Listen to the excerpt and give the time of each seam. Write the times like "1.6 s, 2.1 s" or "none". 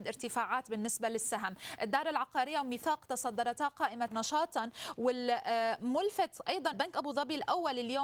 4.1 s, 6.7 s